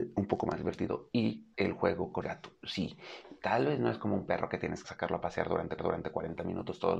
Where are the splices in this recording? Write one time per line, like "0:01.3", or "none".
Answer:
0:01.5
0:02.2
0:04.8
0:05.8